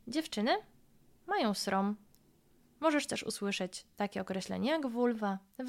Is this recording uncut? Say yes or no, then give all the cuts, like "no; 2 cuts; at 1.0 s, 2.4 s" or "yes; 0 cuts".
yes; 0 cuts